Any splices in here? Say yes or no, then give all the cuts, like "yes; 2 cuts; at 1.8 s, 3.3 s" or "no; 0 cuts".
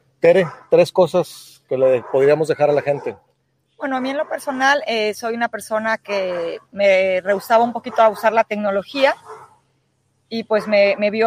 no; 0 cuts